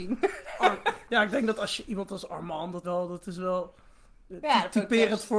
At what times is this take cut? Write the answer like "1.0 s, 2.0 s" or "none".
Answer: 2.8 s